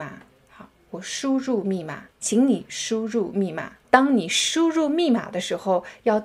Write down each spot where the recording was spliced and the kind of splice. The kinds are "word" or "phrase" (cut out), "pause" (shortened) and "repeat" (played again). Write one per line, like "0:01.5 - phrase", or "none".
0:02.1 - pause
0:03.8 - pause